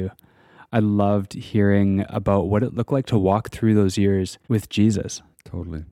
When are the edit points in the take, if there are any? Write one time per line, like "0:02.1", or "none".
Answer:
0:04.4

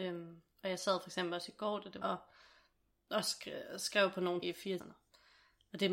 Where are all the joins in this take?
0:02.0
0:04.4
0:04.8

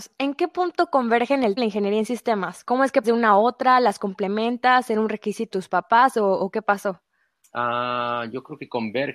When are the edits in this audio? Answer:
0:01.6
0:03.0
0:05.5

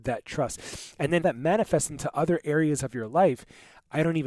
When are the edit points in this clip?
0:01.2

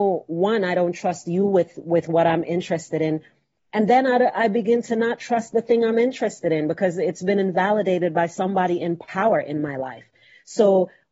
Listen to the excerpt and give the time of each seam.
none

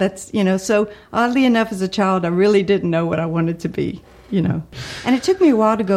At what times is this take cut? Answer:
none

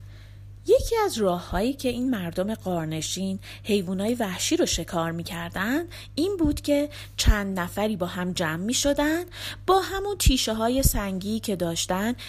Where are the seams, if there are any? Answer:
none

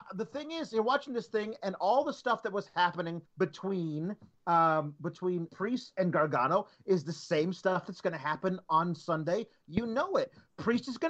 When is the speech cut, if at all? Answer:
0:03.3
0:05.5

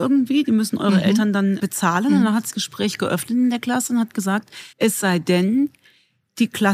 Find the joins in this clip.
0:01.6
0:02.5
0:04.7

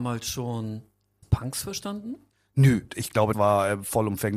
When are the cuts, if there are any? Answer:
0:01.2
0:02.9
0:03.3

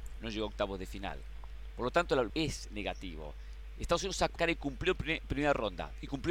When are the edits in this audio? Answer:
0:02.3
0:04.4

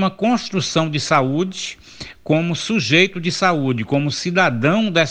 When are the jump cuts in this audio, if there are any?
none

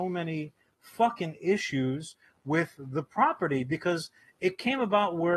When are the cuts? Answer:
none

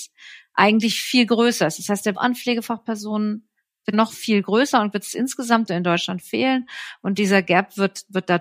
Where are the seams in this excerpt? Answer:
0:02.1
0:03.9
0:04.9
0:05.7

